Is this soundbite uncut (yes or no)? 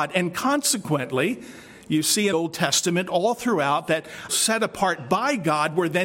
no